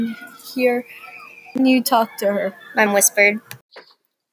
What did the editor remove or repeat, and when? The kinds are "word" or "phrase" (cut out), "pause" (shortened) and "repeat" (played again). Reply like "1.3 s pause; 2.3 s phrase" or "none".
1.6 s word; 2.9 s word